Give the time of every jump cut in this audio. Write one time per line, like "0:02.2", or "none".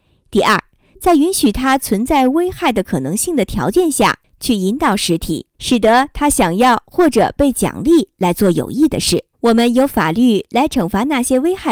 0:05.5
0:09.3